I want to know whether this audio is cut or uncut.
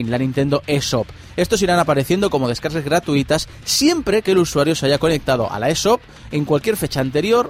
uncut